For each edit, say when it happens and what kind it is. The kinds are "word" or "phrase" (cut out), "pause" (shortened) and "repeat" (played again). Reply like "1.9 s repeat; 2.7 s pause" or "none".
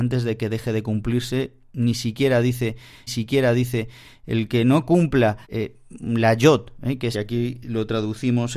3.1 s repeat; 5.4 s pause; 7.1 s phrase